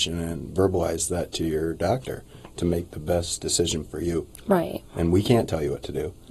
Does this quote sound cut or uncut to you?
cut